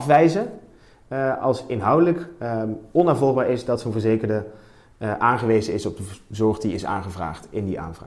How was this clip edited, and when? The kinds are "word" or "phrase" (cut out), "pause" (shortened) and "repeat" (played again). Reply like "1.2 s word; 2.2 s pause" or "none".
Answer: none